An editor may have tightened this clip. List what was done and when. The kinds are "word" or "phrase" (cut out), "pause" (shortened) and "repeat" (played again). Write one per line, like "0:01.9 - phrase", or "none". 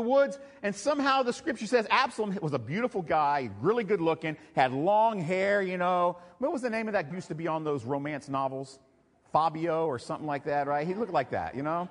0:07.1 - word